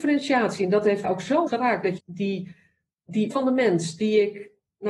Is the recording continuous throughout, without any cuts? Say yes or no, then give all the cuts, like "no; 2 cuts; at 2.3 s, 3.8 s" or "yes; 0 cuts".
no; 4 cuts; at 1.0 s, 1.5 s, 2.0 s, 3.3 s